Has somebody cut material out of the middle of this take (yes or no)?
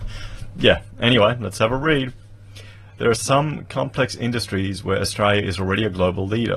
no